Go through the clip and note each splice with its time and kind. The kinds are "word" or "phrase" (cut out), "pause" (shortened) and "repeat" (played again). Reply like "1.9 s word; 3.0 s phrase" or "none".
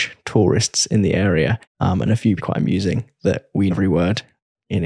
1.6 s pause; 2.4 s phrase; 3.7 s word